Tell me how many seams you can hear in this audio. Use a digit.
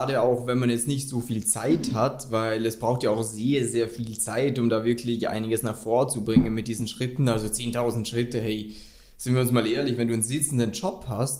0